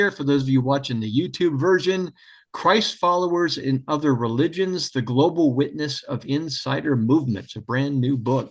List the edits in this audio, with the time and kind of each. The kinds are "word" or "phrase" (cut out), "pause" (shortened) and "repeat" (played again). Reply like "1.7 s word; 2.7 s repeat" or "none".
none